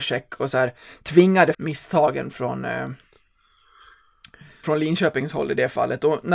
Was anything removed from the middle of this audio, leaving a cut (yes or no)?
yes